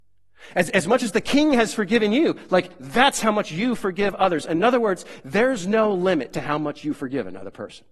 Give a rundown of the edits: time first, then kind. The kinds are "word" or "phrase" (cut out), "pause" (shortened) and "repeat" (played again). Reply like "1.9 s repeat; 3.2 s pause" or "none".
none